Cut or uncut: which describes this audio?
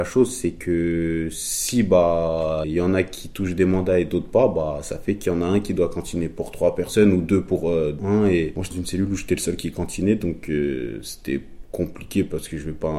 cut